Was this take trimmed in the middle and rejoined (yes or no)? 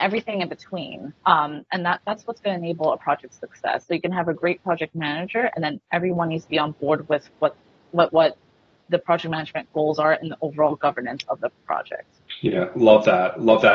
yes